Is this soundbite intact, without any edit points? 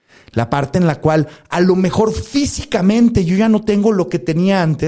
yes; 0 cuts

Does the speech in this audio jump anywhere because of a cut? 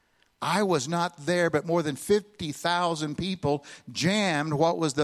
no; 0 cuts

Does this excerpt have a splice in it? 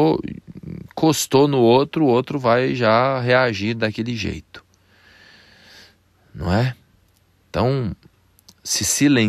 no; 0 cuts

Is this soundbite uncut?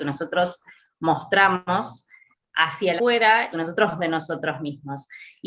no; 3 cuts; at 3.0 s, 3.5 s, 4.0 s

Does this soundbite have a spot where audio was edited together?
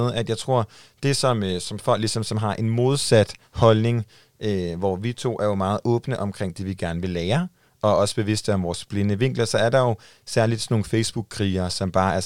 no; 0 cuts

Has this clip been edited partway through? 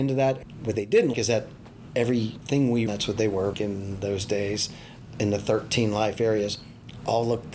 yes; 4 cuts; at 1.1 s, 2.9 s, 3.5 s, 5.1 s

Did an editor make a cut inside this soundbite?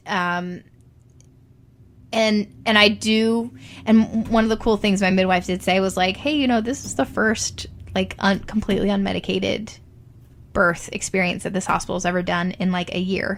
no; 0 cuts

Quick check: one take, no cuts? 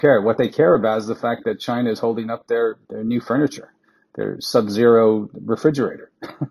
yes; 0 cuts

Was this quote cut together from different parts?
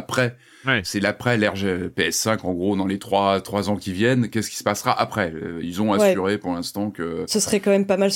no; 0 cuts

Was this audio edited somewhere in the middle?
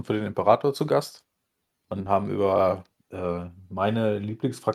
no; 0 cuts

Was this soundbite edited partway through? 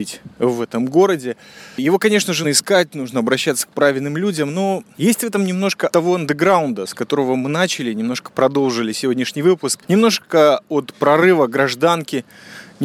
yes; 2 cuts; at 2.4 s, 5.9 s

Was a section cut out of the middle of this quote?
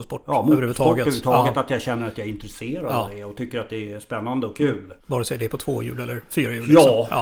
yes; 1 cut; at 5.0 s

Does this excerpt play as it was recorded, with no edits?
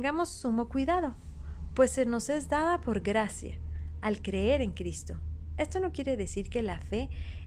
yes; 0 cuts

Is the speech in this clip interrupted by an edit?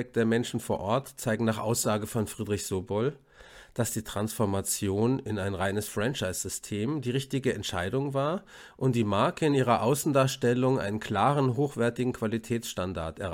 no; 0 cuts

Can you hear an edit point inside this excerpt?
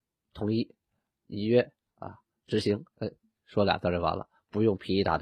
no; 0 cuts

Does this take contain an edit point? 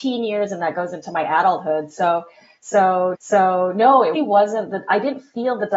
yes; 2 cuts; at 3.1 s, 4.1 s

